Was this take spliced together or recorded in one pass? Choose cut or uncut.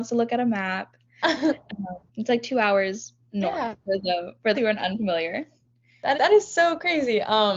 cut